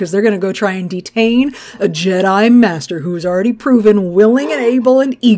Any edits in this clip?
no; 0 cuts

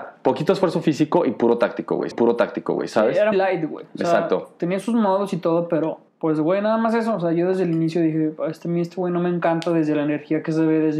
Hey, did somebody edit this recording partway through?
yes; 3 cuts; at 2.1 s, 3.3 s, 6.1 s

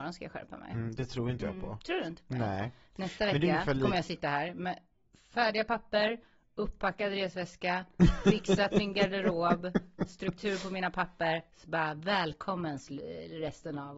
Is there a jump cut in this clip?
no; 0 cuts

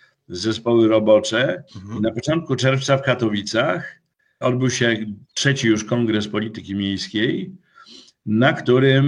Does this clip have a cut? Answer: yes; 3 cuts; at 1.7 s, 4.4 s, 5.2 s

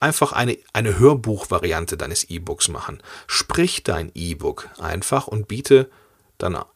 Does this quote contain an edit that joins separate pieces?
no; 0 cuts

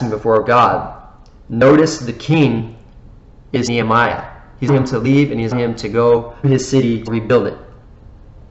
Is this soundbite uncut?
no; 5 cuts; at 3.7 s, 4.7 s, 5.5 s, 6.4 s, 7.1 s

